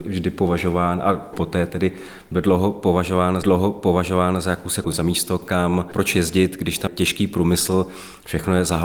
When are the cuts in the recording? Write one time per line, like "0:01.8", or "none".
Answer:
0:01.3
0:03.4
0:04.8
0:06.9

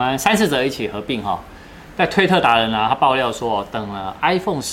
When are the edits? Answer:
none

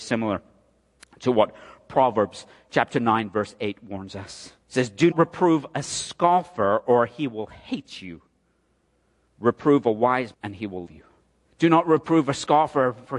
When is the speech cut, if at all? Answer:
0:04.6
0:05.1
0:10.3
0:10.9
0:11.4

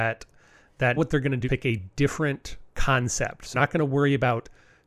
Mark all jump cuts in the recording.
0:01.0
0:01.4
0:02.7
0:03.5

